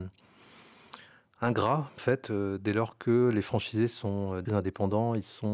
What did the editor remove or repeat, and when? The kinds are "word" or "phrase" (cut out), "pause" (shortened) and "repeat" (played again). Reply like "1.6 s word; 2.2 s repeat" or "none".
2.0 s word; 4.5 s phrase